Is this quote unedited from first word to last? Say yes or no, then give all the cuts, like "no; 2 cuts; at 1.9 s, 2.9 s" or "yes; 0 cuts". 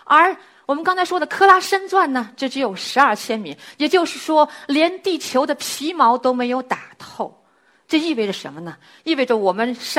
yes; 0 cuts